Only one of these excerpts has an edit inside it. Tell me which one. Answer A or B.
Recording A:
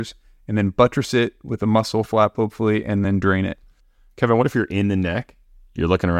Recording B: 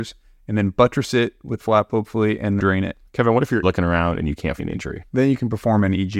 B